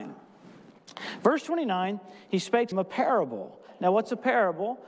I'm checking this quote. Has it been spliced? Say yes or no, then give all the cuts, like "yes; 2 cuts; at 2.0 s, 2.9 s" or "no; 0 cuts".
yes; 1 cut; at 2.7 s